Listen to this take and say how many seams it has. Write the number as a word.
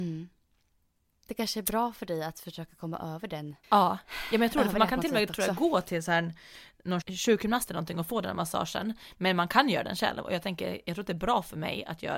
two